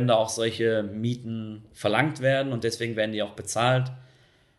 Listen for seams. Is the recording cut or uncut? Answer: uncut